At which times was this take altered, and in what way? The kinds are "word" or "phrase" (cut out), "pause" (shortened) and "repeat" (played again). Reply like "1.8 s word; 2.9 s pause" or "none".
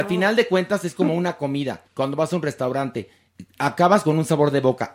1.9 s pause